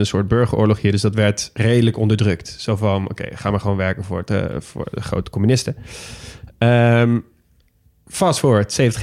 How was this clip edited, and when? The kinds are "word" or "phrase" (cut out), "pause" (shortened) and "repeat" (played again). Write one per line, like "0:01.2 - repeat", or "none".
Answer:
none